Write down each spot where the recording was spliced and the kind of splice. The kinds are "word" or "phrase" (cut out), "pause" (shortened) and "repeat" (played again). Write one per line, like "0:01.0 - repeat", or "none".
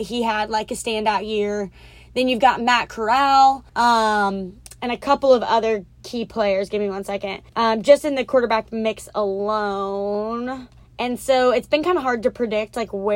0:03.7 - pause
0:07.5 - pause
0:10.8 - pause